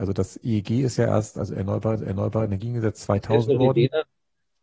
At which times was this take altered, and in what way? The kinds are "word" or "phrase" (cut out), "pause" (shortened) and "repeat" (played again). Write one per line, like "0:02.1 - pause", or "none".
0:02.0 - repeat
0:03.5 - phrase